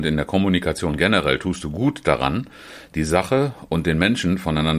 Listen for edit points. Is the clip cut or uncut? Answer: uncut